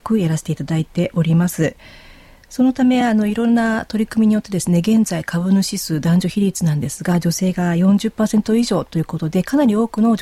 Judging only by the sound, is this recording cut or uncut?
uncut